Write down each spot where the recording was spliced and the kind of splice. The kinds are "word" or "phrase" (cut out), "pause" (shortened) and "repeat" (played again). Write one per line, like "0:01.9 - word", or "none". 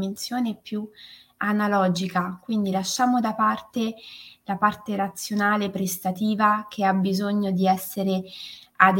none